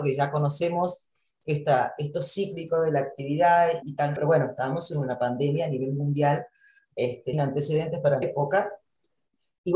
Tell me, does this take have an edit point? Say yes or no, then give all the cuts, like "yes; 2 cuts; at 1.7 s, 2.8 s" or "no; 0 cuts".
yes; 5 cuts; at 2.1 s, 3.8 s, 4.2 s, 7.3 s, 8.2 s